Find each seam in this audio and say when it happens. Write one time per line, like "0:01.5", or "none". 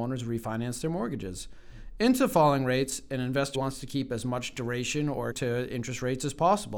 0:03.5
0:05.3